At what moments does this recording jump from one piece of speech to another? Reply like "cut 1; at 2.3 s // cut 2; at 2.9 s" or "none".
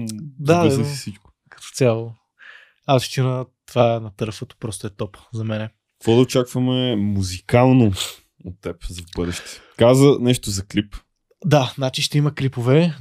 none